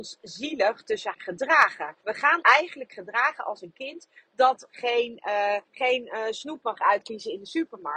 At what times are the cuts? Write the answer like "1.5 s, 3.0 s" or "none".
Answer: 1.1 s, 2.0 s, 2.4 s, 3.7 s, 5.7 s